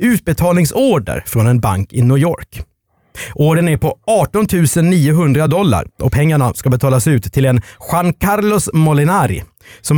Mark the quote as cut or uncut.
uncut